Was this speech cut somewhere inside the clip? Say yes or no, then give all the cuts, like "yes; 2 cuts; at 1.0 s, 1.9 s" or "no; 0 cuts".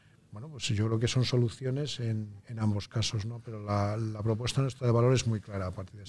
yes; 1 cut; at 2.4 s